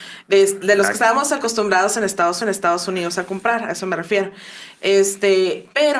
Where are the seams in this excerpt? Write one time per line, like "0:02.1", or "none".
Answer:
0:02.4